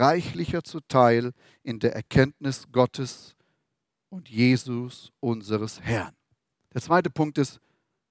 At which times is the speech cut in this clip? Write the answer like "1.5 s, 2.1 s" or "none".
none